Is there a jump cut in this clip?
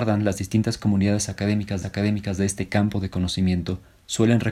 yes; 1 cut; at 1.8 s

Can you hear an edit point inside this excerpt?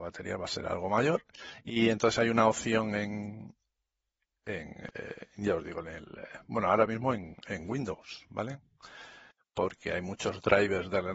no; 0 cuts

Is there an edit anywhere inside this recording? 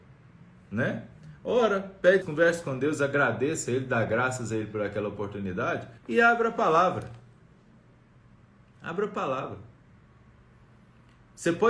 yes; 2 cuts; at 2.2 s, 6.0 s

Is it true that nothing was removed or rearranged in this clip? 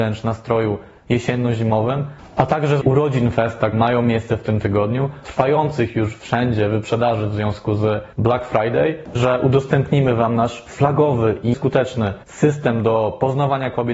no; 7 cuts; at 2.8 s, 3.7 s, 5.2 s, 8.1 s, 9.2 s, 11.5 s, 12.2 s

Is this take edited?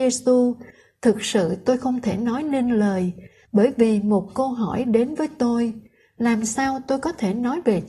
no; 0 cuts

